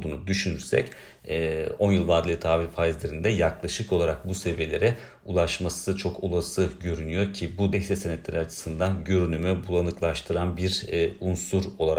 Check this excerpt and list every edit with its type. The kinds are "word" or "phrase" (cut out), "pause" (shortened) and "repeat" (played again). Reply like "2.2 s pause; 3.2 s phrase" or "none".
7.7 s phrase